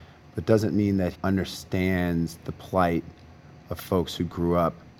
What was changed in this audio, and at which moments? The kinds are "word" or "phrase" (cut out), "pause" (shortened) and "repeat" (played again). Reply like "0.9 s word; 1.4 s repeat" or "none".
1.1 s word